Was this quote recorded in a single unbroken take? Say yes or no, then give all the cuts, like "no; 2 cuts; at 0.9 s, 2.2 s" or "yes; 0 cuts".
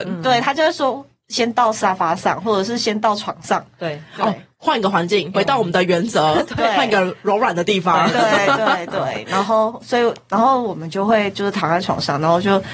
no; 1 cut; at 5.3 s